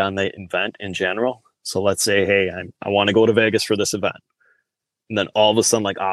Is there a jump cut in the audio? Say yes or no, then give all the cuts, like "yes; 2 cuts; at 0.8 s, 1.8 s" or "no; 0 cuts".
no; 0 cuts